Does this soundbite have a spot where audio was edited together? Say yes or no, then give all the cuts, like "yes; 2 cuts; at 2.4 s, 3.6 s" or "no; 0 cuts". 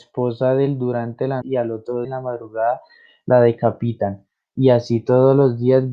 yes; 2 cuts; at 1.4 s, 2.0 s